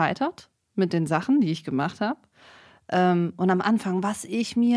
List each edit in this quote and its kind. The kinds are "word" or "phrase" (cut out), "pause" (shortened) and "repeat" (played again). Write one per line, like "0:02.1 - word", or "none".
none